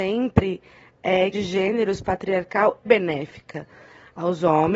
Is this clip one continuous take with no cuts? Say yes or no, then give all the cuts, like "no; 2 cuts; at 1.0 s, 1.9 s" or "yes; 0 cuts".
no; 2 cuts; at 1.3 s, 2.9 s